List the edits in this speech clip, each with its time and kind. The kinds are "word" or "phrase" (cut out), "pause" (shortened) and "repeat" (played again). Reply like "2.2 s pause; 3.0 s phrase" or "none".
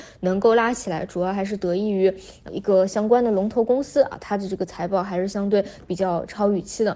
2.5 s word